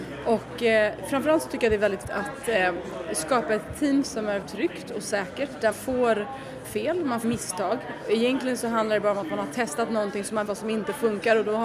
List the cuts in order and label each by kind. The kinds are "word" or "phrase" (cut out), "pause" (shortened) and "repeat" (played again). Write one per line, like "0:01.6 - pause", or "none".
0:02.0 - word
0:04.4 - word
0:05.7 - word
0:06.6 - word
0:07.2 - word
0:10.5 - word